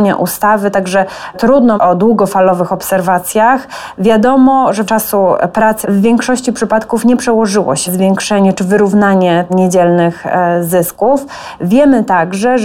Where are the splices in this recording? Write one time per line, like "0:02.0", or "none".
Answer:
0:01.8
0:04.9
0:05.8
0:07.9
0:09.5